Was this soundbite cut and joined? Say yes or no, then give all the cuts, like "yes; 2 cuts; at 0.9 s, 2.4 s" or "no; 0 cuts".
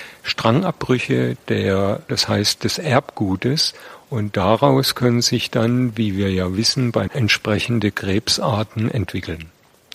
yes; 2 cuts; at 2.1 s, 7.1 s